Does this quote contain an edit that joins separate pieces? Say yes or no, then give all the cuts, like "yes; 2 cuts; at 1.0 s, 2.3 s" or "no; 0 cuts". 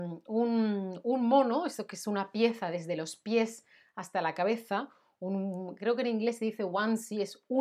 no; 0 cuts